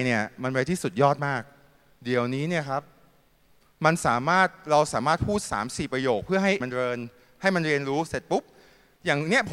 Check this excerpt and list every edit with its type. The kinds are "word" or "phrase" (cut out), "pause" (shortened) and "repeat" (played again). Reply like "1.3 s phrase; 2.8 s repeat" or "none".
6.6 s word